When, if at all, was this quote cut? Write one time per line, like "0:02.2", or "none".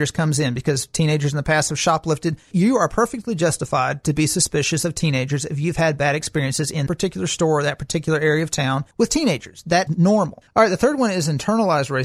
0:02.5
0:06.9
0:08.9
0:09.9